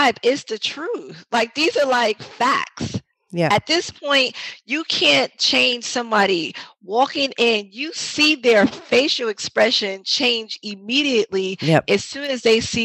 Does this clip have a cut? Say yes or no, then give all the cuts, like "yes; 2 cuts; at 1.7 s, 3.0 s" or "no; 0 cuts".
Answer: no; 0 cuts